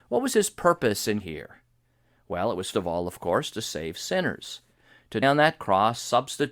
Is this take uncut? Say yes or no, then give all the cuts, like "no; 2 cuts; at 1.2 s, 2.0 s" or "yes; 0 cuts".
no; 3 cuts; at 1.2 s, 2.7 s, 5.2 s